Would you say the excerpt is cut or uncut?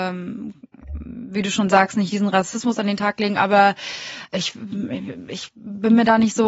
uncut